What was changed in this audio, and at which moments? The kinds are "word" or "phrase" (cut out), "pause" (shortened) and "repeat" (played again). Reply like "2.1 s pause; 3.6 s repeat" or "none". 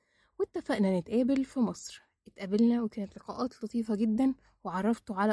none